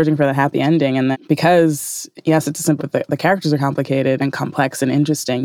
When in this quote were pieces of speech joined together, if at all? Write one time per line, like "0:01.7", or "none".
0:01.1
0:02.8
0:04.2